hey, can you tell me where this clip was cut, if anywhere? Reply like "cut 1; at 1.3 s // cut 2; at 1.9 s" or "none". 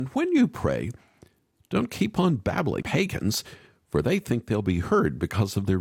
cut 1; at 2.8 s